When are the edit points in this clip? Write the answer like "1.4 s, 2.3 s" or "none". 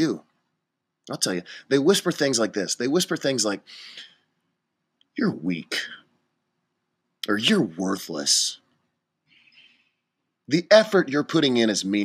none